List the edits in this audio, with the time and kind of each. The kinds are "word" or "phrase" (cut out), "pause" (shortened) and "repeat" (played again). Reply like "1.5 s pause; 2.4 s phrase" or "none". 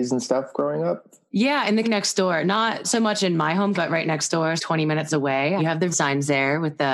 1.8 s word; 2.8 s word; 3.7 s word; 4.6 s word; 5.6 s word; 5.9 s word